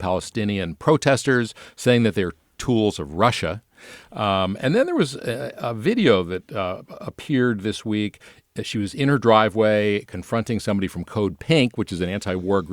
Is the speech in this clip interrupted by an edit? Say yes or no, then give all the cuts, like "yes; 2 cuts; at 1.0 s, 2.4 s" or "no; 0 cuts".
no; 0 cuts